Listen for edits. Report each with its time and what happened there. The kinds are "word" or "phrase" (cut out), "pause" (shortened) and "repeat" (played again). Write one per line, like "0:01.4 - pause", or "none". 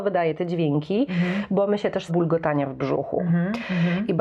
0:02.1 - phrase